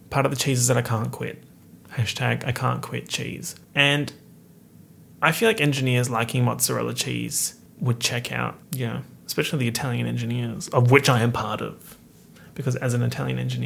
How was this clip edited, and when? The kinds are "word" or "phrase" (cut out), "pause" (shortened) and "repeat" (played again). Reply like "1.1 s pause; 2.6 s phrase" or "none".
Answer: 3.6 s pause; 7.7 s pause; 8.6 s pause